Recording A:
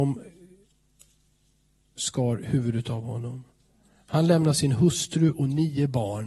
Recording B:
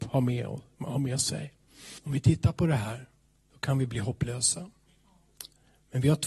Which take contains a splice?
B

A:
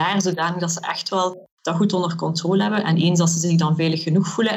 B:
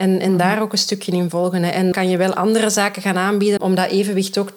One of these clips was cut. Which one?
B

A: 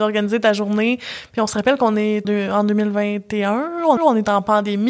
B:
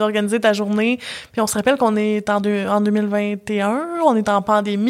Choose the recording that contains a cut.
A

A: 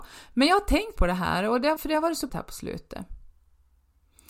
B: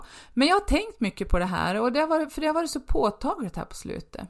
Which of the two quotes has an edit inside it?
A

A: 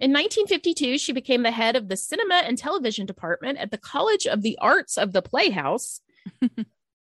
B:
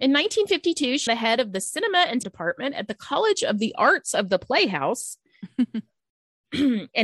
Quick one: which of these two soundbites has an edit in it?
B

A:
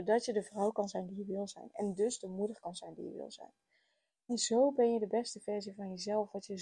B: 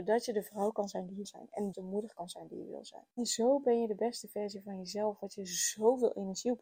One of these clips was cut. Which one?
B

